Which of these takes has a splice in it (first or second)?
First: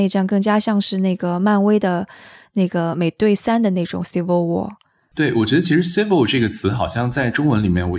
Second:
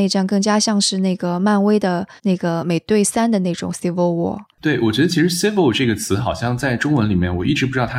second